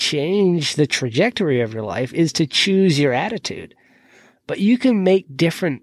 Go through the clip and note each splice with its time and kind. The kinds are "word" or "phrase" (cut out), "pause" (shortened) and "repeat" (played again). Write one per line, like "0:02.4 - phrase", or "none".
none

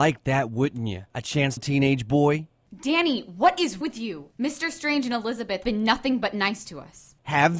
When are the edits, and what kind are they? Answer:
0:01.1 - pause
0:01.6 - phrase
0:03.8 - word
0:04.3 - pause
0:05.6 - word

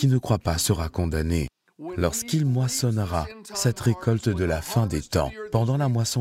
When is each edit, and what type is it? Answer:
none

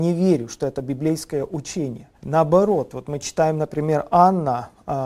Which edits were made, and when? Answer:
0:02.2 - pause

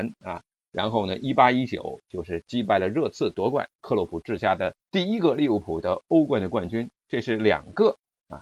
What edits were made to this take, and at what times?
0:03.8 - phrase
0:04.8 - pause

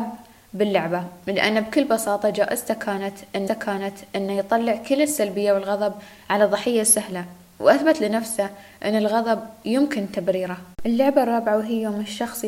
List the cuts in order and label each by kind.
0:03.5 - repeat
0:10.7 - pause

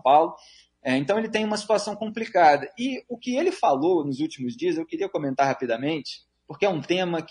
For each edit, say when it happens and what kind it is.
none

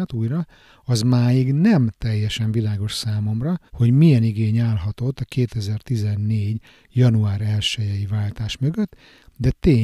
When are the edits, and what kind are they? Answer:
0:03.7 - pause

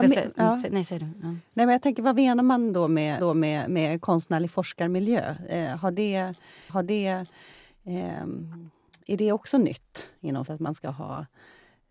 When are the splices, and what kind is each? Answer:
0:03.2 - repeat
0:06.7 - repeat
0:10.5 - word

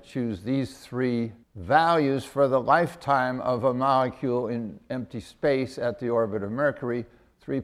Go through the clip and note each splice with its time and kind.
0:01.4 - pause

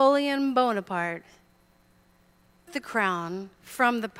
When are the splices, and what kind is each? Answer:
0:02.7 - word

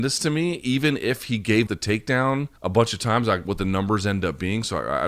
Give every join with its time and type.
0:01.7 - word
0:02.6 - pause
0:03.4 - phrase

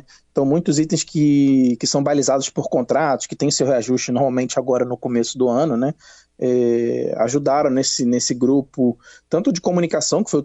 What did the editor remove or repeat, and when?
none

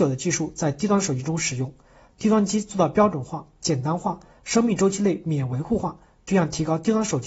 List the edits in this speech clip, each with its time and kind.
none

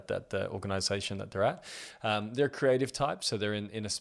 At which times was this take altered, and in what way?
none

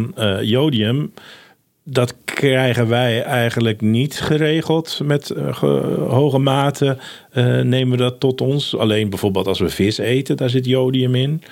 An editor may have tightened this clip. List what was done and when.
none

